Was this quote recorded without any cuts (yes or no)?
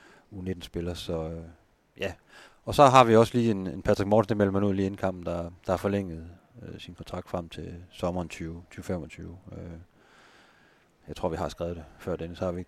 yes